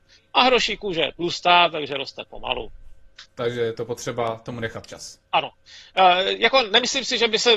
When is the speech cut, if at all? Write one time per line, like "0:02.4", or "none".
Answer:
0:03.3
0:05.3